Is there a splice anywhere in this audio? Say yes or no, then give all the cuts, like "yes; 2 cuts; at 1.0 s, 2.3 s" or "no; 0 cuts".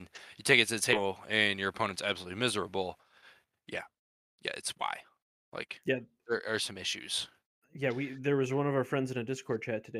no; 0 cuts